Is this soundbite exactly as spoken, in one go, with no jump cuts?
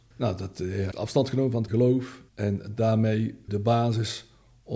no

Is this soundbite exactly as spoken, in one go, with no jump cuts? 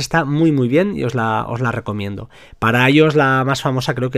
yes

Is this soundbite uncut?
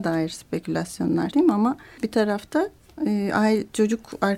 no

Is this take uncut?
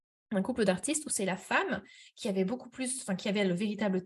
yes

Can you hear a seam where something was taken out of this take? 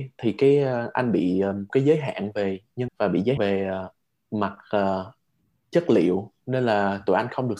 yes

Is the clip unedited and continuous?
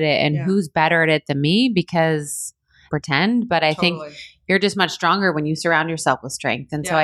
no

